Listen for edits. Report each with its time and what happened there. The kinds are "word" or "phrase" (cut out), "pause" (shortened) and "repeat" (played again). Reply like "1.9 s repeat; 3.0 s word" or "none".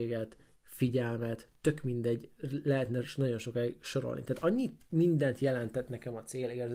none

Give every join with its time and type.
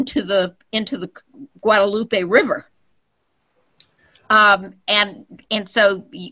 none

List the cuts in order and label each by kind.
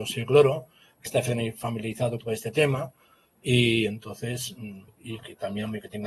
1.1 s word; 2.2 s word; 4.9 s word

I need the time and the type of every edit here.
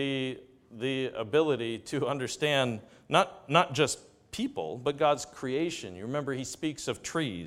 none

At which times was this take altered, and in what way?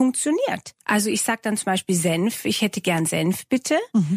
none

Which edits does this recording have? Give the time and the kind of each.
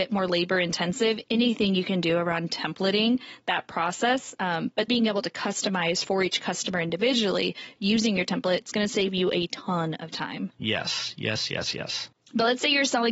4.9 s word

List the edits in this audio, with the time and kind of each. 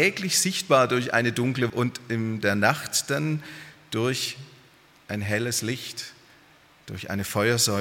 1.7 s word

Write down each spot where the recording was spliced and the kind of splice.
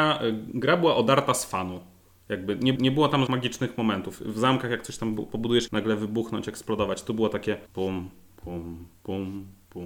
2.8 s repeat; 3.3 s word; 5.7 s phrase; 7.7 s pause

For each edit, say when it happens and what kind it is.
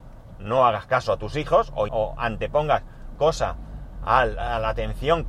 1.9 s word; 3.1 s word

